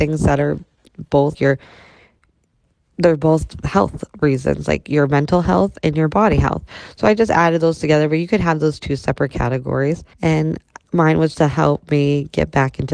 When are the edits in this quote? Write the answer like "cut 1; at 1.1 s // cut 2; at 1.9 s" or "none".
cut 1; at 1.3 s // cut 2; at 10.1 s // cut 3; at 11.3 s